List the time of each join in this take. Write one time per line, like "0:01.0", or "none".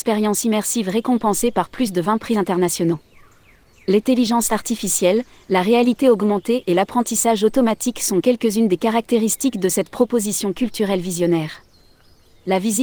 none